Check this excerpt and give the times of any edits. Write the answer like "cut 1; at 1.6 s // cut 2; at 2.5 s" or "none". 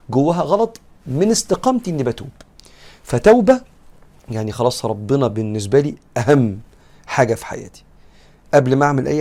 none